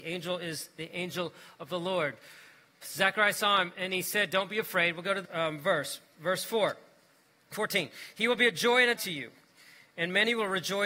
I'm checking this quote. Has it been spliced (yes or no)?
yes